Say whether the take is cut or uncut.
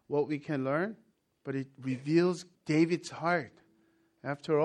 cut